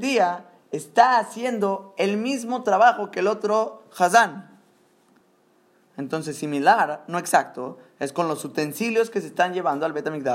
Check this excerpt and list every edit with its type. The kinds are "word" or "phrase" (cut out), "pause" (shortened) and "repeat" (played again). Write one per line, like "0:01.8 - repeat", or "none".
none